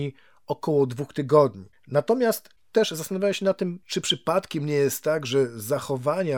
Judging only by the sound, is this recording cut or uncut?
cut